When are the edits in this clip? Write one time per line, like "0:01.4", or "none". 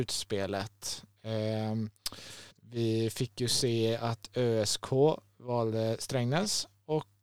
0:02.5